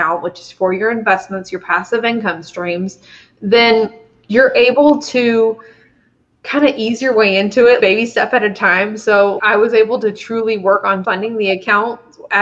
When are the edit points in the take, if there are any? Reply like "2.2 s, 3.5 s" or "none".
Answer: 7.8 s, 9.4 s, 11.0 s